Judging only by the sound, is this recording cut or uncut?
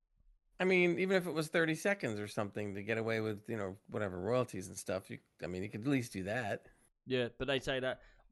uncut